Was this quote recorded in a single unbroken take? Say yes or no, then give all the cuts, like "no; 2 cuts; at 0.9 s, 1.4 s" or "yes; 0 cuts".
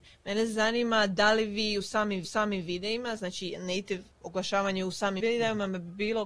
no; 3 cuts; at 2.2 s, 4.1 s, 5.2 s